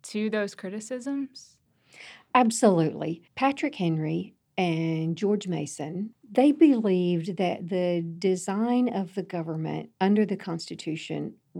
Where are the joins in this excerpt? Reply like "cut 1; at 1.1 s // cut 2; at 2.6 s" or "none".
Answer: cut 1; at 3.3 s // cut 2; at 9.9 s